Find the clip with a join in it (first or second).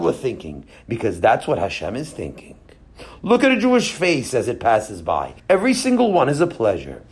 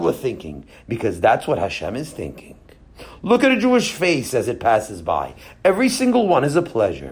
first